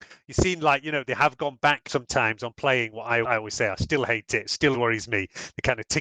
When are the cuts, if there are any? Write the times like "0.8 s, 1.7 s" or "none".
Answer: 1.9 s, 3.2 s, 4.7 s